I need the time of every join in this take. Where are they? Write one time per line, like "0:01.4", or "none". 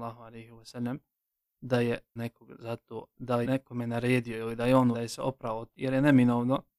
0:02.2
0:03.4
0:04.9
0:05.7

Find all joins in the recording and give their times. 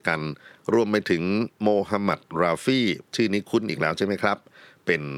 0:03.1

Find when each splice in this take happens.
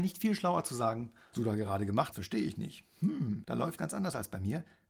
0:01.3
0:02.1
0:03.4
0:03.8

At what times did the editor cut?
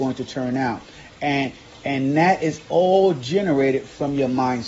none

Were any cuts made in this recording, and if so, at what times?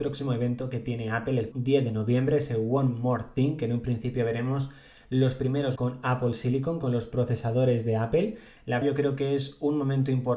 0:01.5
0:05.8
0:08.8

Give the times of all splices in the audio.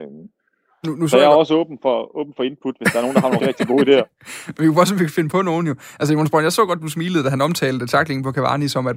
0:03.4

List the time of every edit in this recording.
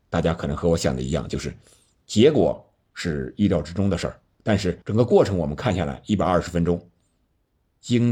0:04.8

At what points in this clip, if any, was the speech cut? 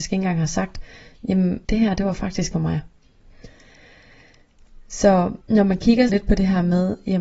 0:01.6
0:02.5
0:05.4
0:06.1

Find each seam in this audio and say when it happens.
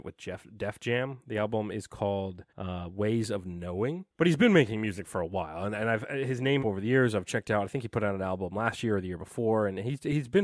0:02.5
0:04.1
0:06.6

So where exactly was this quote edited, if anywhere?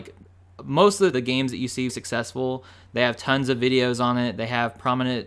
0:01.1
0:01.9

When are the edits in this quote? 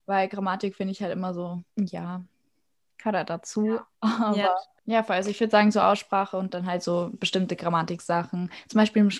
0:01.7
0:03.9

